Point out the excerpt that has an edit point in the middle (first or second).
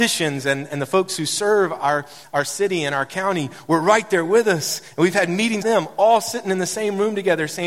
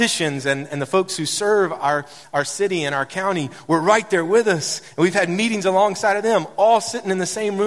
first